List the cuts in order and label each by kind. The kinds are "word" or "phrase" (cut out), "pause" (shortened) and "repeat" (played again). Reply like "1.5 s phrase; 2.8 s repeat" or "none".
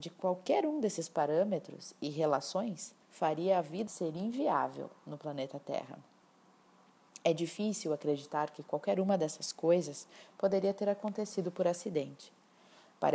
3.0 s pause; 3.9 s word